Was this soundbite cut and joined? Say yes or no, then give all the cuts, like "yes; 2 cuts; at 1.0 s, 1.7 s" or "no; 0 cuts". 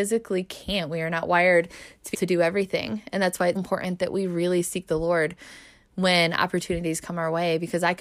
yes; 2 cuts; at 2.1 s, 3.6 s